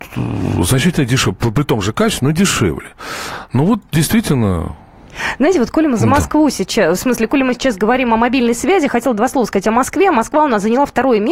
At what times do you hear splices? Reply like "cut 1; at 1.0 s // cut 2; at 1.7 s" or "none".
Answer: none